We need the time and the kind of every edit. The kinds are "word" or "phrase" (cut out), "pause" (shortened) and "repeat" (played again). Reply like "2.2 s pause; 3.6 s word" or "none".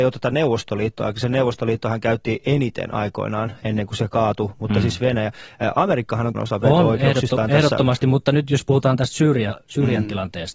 6.3 s phrase